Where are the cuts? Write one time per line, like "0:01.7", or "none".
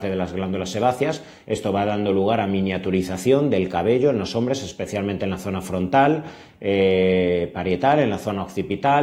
none